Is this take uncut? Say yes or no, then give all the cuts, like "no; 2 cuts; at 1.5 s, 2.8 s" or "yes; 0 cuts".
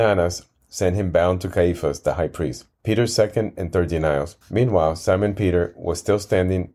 no; 2 cuts; at 2.7 s, 4.4 s